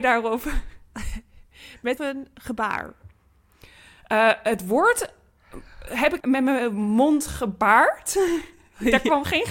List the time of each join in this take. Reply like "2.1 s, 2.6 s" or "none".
2.0 s, 6.2 s

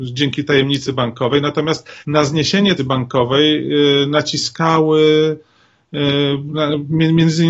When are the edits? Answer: 2.0 s, 2.8 s

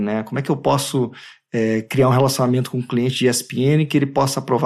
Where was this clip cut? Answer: none

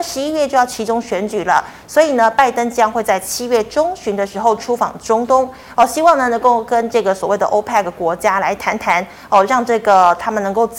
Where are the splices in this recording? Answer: none

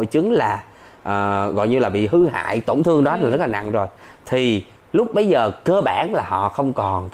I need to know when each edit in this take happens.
none

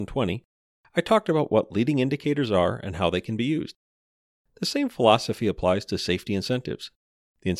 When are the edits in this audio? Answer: none

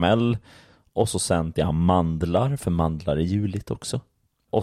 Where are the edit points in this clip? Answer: 1.5 s

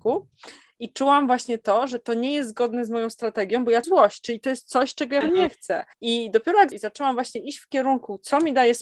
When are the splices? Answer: 3.8 s, 5.2 s, 5.9 s, 6.7 s

